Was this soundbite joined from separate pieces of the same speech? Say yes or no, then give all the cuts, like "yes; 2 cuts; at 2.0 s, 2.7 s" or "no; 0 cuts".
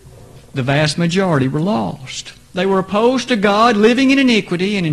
no; 0 cuts